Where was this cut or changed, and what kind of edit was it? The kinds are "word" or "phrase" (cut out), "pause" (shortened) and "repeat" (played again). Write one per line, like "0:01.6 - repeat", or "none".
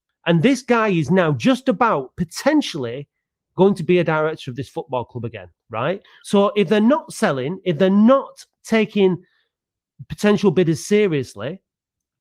none